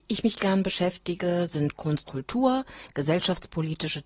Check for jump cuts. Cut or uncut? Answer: cut